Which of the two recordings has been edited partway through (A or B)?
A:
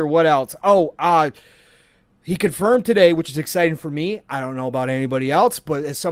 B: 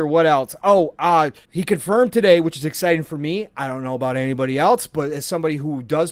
B